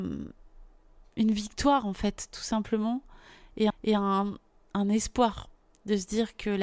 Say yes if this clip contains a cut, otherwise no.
yes